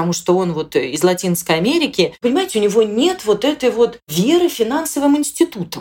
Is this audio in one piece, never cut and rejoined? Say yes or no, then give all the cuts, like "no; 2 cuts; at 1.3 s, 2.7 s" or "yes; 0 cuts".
yes; 0 cuts